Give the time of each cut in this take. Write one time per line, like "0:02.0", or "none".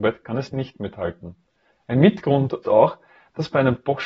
0:02.6